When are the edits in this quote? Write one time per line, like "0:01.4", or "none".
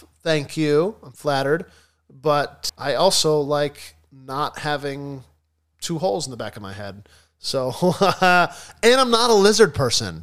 0:02.7